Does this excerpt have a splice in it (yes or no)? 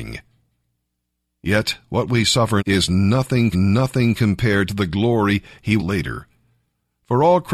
yes